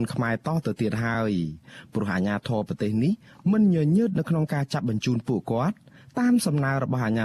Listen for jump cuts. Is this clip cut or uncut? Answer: uncut